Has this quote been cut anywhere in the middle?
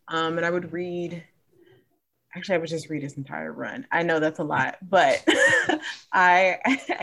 no; 0 cuts

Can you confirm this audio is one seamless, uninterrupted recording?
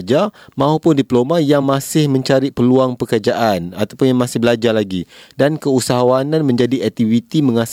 yes; 0 cuts

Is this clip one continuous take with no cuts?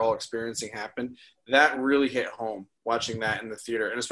yes; 0 cuts

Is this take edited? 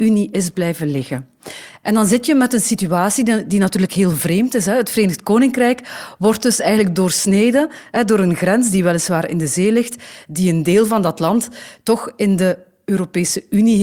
no; 0 cuts

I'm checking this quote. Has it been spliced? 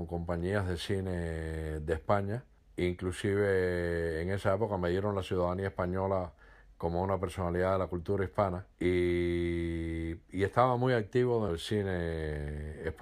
yes; 3 cuts; at 2.6 s, 8.7 s, 11.5 s

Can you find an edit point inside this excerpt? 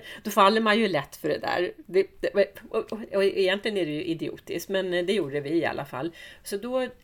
no; 0 cuts

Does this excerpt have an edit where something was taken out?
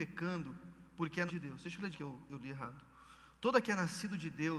yes; 3 cuts; at 1.3 s, 1.9 s, 3.6 s

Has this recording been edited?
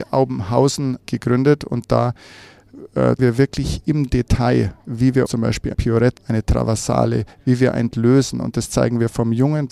yes; 6 cuts; at 1.0 s, 3.2 s, 5.3 s, 5.7 s, 6.2 s, 7.9 s

